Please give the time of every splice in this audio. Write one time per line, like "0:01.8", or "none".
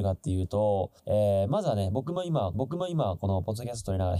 0:01.0
0:02.5